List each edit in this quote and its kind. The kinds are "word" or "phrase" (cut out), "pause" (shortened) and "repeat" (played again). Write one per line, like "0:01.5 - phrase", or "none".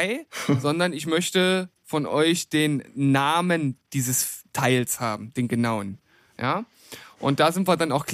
0:04.5 - pause